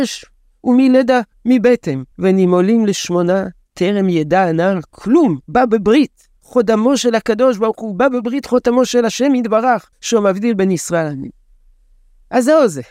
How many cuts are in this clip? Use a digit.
4